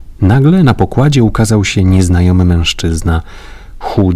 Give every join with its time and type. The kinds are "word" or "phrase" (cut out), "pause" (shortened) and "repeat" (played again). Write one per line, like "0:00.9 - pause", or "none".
none